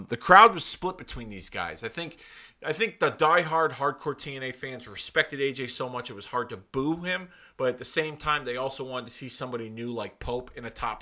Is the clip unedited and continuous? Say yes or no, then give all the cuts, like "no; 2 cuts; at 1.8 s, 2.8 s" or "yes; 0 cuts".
yes; 0 cuts